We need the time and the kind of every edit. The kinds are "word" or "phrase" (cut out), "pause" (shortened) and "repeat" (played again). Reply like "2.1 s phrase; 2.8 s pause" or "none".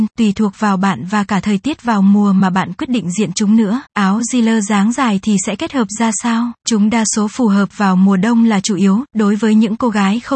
3.9 s pause; 6.6 s pause